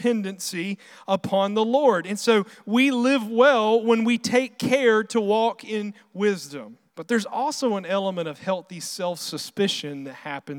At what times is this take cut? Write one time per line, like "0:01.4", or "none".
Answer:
0:06.9

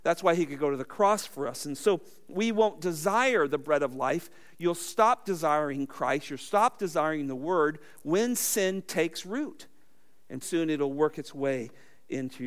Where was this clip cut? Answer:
0:10.4

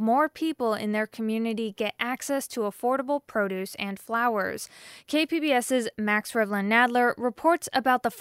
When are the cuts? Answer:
none

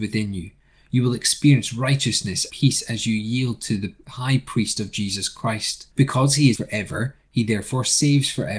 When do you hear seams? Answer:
0:02.5
0:05.9
0:06.5

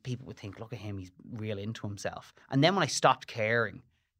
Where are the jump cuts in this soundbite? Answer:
0:02.4

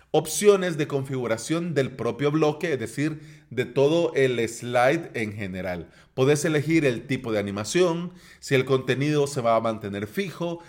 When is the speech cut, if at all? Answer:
none

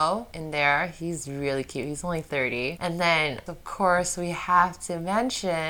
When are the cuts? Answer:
0:03.5

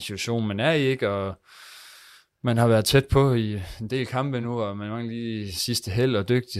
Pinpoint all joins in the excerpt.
none

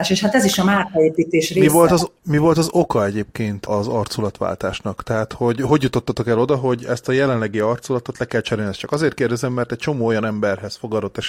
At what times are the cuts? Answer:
none

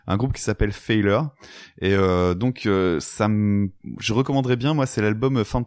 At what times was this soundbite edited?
none

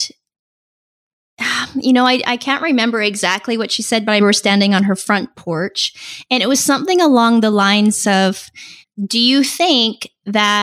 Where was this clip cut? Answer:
0:04.2
0:08.8

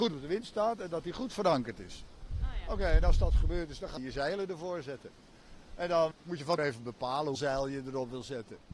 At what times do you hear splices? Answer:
0:04.0
0:06.1
0:06.6
0:07.3

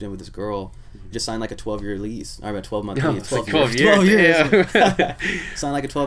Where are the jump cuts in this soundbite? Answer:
0:01.1

